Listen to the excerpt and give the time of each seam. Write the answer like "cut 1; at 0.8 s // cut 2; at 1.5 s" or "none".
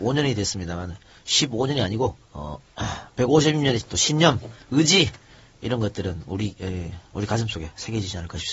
cut 1; at 2.2 s // cut 2; at 3.8 s

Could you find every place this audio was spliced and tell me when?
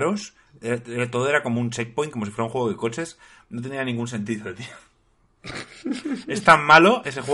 none

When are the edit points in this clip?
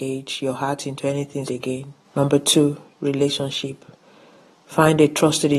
cut 1; at 1.5 s // cut 2; at 2.0 s

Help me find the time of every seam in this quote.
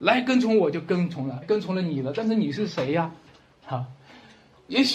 cut 1; at 1.4 s

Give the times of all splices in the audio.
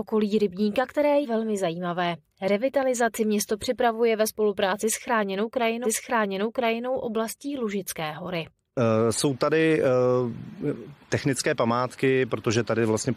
cut 1; at 1.2 s // cut 2; at 5.8 s // cut 3; at 11.0 s

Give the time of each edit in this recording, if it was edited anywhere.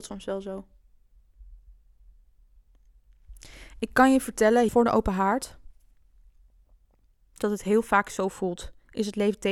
cut 1; at 4.7 s

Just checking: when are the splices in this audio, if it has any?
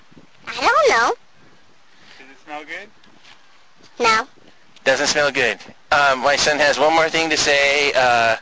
none

